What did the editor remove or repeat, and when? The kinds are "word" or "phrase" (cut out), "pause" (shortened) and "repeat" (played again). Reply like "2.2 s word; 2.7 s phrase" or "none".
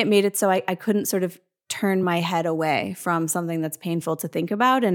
none